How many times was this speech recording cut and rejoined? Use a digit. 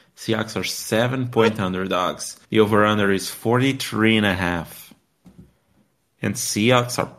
1